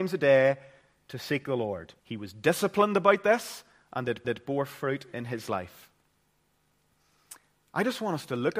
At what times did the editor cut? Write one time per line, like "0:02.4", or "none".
0:02.0
0:04.2